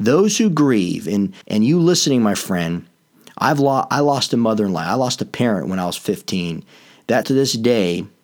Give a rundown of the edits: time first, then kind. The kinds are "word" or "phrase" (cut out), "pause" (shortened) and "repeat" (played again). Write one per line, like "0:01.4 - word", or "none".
0:01.4 - pause
0:07.2 - word